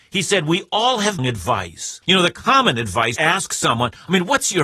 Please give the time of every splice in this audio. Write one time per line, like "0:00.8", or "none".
0:01.2
0:02.0
0:03.2